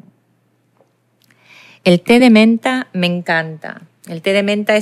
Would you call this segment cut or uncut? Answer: uncut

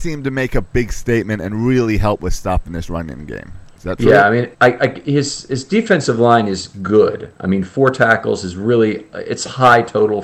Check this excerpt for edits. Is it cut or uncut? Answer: cut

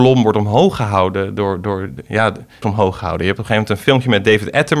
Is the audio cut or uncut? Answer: cut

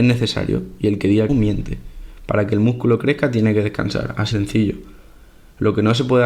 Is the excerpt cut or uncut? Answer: cut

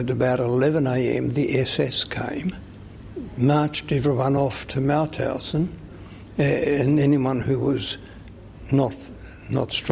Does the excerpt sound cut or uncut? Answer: uncut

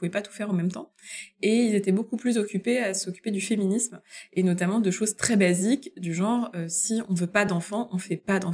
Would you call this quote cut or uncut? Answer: uncut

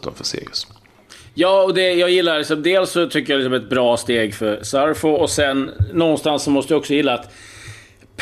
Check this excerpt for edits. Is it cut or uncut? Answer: uncut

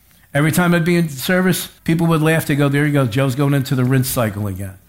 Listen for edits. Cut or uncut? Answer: cut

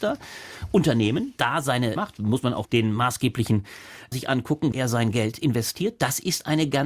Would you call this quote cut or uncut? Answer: cut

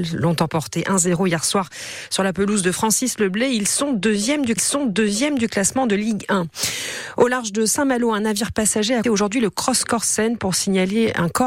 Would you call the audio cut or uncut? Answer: cut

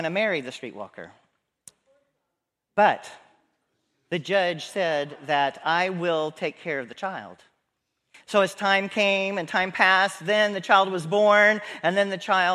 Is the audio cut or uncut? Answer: uncut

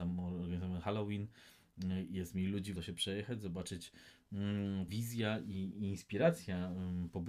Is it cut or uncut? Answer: cut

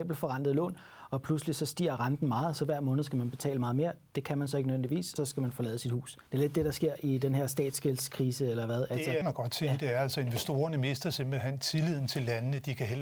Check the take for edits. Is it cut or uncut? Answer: cut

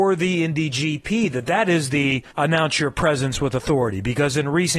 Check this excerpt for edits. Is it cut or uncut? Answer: cut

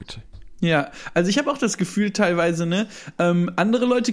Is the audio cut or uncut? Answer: uncut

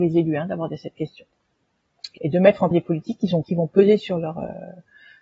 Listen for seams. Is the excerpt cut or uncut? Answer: cut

